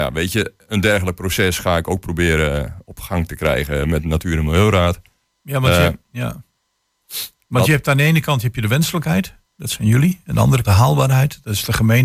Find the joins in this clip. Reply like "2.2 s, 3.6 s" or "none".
10.6 s

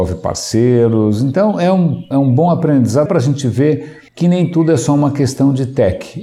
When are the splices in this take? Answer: 2.1 s, 3.1 s, 4.1 s

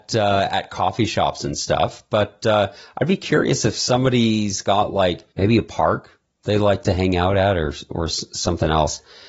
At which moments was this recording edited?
5.3 s

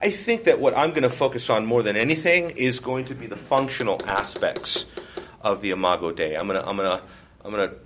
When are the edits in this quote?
none

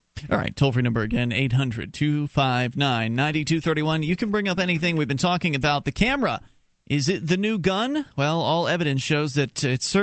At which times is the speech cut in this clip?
none

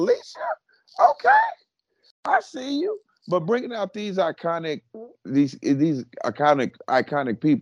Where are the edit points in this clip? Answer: none

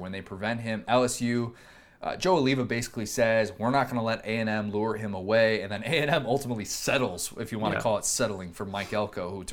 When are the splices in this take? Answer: none

